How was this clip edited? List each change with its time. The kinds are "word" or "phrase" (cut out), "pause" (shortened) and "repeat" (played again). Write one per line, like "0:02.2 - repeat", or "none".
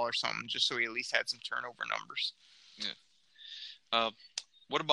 none